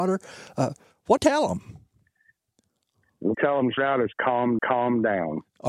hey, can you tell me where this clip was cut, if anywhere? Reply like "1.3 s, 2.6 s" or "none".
1.2 s, 3.3 s, 3.8 s, 4.6 s